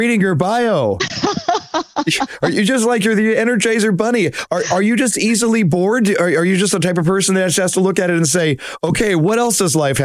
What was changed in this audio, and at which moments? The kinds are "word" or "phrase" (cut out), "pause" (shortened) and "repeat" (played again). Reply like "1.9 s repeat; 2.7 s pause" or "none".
none